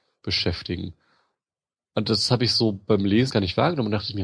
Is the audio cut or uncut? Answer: cut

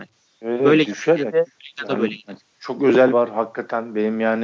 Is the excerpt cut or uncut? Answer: cut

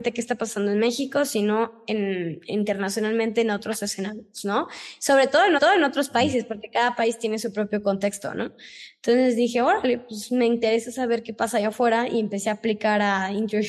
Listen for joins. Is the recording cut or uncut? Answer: cut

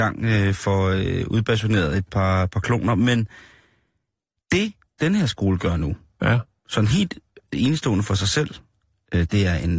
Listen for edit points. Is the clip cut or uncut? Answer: uncut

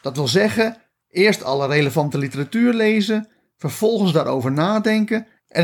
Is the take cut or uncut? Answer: uncut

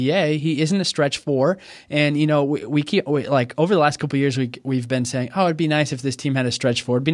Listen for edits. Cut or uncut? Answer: uncut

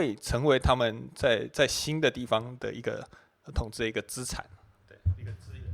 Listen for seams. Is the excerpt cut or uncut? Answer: uncut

